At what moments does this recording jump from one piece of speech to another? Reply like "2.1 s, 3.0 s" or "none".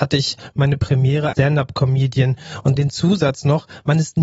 1.3 s, 2.8 s